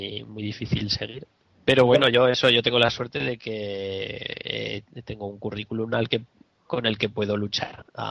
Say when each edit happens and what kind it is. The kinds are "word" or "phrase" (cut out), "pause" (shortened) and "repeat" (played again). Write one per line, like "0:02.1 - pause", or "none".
none

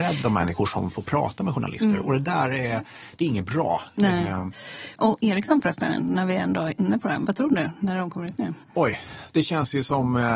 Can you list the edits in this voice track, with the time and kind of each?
0:08.6 - pause

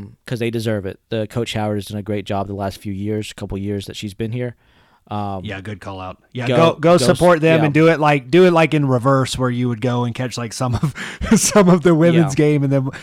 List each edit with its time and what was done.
none

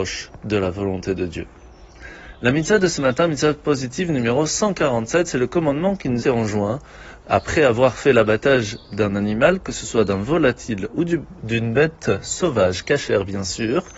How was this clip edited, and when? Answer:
0:06.2 - phrase

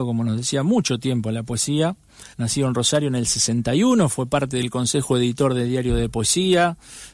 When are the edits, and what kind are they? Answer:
0:02.3 - pause

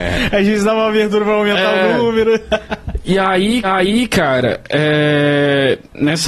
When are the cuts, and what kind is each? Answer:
0:03.6 - repeat

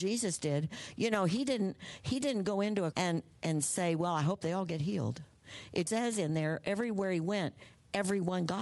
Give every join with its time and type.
0:02.9 - word
0:05.9 - word

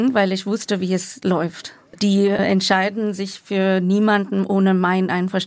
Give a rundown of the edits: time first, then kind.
none

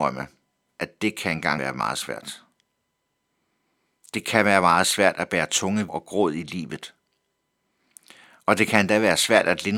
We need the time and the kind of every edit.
0:01.6 - word
0:05.9 - word

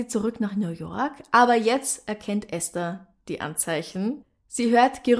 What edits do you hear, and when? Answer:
none

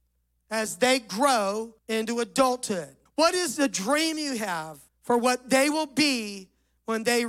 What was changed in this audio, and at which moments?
0:01.8 - pause
0:03.1 - pause
0:04.9 - pause

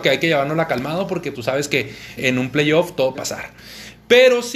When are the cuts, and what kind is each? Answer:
0:01.3 - word
0:02.2 - word
0:03.1 - word

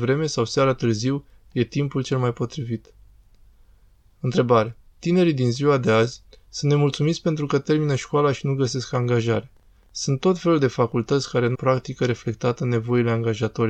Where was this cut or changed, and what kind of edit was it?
0:11.5 - word

